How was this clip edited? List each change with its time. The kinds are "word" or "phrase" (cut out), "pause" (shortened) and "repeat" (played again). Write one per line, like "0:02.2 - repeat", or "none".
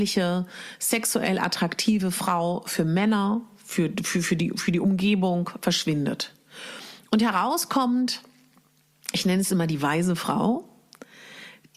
none